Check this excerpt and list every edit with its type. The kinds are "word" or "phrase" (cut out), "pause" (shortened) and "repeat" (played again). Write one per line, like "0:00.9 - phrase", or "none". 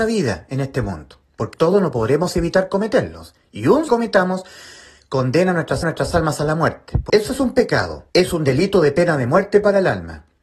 0:01.5 - word
0:03.9 - phrase
0:05.8 - repeat
0:07.1 - word
0:08.1 - pause